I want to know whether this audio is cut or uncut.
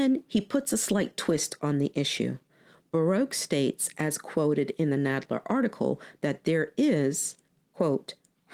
uncut